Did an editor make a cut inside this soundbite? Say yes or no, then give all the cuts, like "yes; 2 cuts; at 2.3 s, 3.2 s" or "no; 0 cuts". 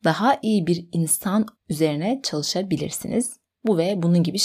yes; 1 cut; at 1.6 s